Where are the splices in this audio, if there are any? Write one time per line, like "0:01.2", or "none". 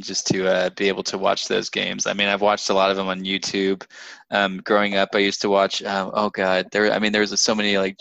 none